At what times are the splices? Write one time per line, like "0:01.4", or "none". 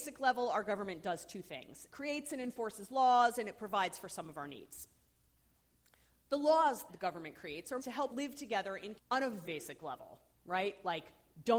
0:01.9
0:06.9
0:07.8
0:08.1
0:09.0
0:09.4